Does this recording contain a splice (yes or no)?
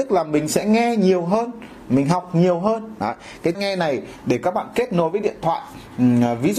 yes